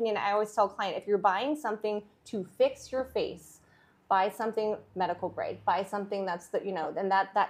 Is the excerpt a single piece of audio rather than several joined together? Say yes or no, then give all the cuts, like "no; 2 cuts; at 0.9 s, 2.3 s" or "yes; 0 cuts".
yes; 0 cuts